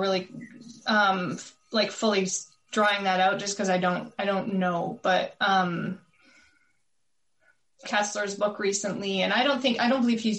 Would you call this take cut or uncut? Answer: cut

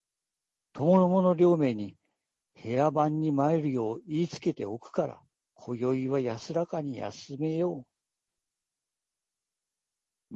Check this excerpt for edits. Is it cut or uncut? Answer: cut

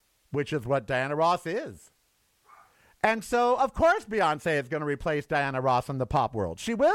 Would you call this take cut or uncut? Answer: uncut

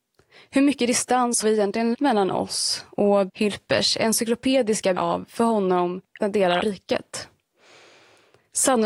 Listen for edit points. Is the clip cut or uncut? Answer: cut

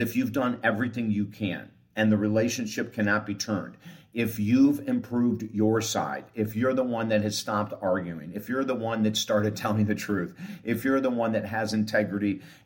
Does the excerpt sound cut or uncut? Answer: uncut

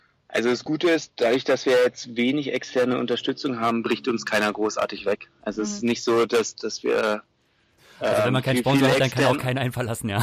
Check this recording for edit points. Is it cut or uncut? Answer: uncut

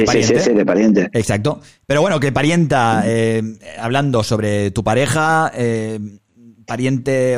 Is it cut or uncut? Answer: uncut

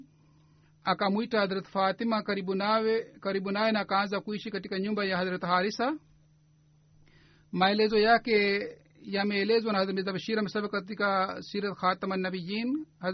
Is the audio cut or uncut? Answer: uncut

